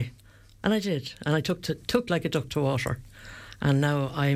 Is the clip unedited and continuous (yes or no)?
no